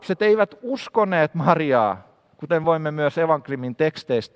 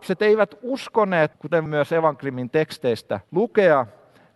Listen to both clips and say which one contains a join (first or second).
second